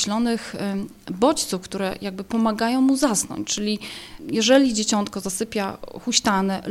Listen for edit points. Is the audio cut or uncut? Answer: uncut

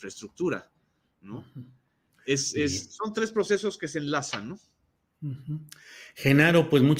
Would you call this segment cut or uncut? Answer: uncut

